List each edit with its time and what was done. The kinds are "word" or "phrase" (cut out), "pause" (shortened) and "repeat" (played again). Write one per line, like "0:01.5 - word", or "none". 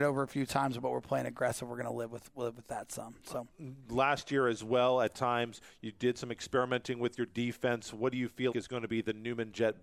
0:08.5 - word